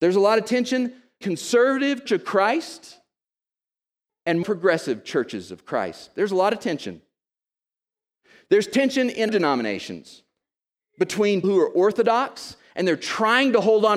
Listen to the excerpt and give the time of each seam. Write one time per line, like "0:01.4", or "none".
0:01.2
0:02.1
0:04.4
0:09.3
0:11.4